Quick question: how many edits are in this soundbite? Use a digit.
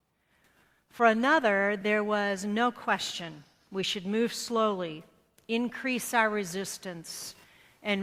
0